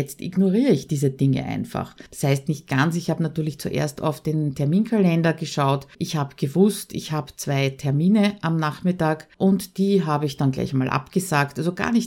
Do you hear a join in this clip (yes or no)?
yes